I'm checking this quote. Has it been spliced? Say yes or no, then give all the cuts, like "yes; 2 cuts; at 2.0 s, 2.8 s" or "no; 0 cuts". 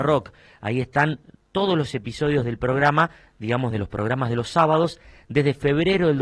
no; 0 cuts